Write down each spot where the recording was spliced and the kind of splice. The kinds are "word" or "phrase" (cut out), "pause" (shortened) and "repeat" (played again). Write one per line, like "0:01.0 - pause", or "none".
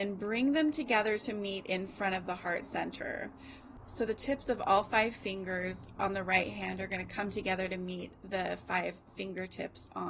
none